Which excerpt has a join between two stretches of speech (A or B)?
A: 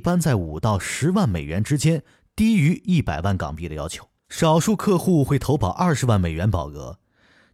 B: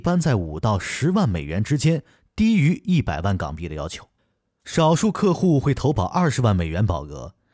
A